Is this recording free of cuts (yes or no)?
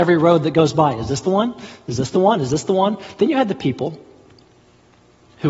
yes